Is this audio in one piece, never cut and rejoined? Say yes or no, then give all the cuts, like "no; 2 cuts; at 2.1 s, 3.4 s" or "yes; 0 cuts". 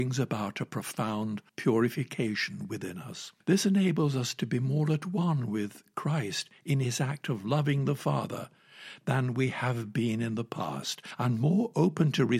no; 2 cuts; at 1.5 s, 3.4 s